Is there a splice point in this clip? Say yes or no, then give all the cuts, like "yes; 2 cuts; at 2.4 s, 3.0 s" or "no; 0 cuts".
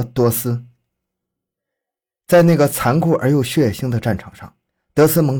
no; 0 cuts